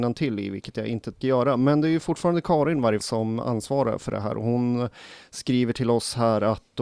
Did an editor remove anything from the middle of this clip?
yes; 2 cuts; at 1.2 s, 3.0 s

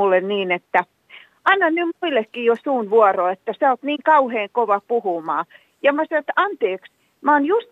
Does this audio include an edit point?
no; 0 cuts

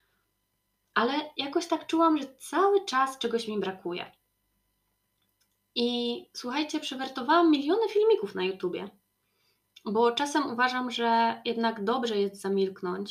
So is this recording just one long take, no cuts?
yes; 0 cuts

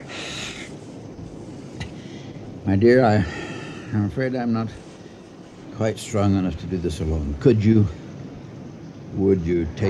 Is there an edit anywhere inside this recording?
no; 0 cuts

